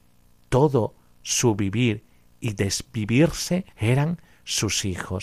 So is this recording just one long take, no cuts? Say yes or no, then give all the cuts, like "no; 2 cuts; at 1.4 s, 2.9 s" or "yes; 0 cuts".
no; 1 cut; at 3.7 s